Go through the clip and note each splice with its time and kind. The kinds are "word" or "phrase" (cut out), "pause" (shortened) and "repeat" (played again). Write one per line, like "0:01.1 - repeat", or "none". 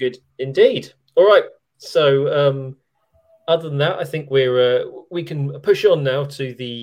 none